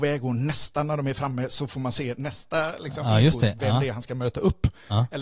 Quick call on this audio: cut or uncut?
uncut